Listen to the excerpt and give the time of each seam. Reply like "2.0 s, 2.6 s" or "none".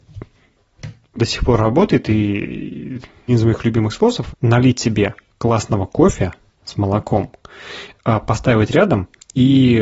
1.2 s, 3.3 s, 4.3 s, 5.3 s